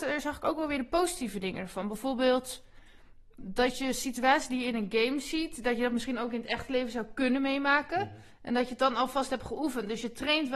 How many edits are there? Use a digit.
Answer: 1